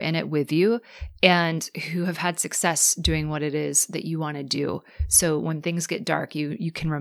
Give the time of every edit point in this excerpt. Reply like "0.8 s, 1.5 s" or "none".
none